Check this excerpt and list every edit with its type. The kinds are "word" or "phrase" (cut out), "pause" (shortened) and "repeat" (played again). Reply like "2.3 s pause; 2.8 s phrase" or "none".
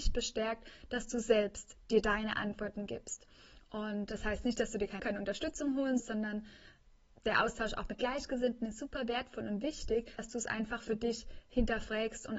5.0 s word; 6.0 s word; 10.2 s word

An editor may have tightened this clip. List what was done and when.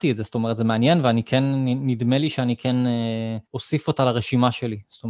3.5 s pause

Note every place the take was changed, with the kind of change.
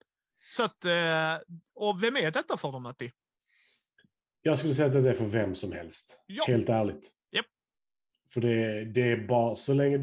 none

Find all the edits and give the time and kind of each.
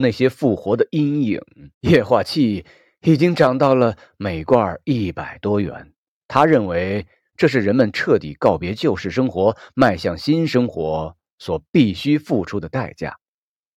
1.7 s pause

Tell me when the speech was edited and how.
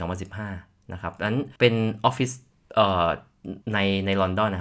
1.6 s pause; 3.6 s pause

